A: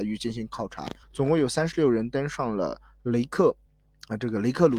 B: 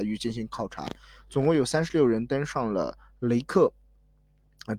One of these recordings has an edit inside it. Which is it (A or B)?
A